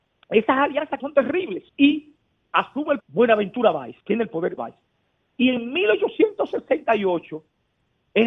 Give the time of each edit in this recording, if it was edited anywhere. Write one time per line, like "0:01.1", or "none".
0:01.0
0:01.7
0:03.0
0:04.0
0:04.6